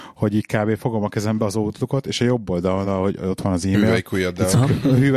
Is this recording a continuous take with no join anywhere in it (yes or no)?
yes